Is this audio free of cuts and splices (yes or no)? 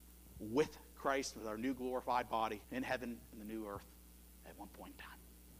no